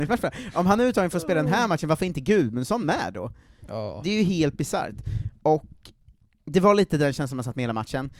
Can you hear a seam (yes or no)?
no